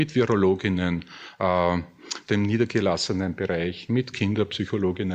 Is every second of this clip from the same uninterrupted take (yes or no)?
no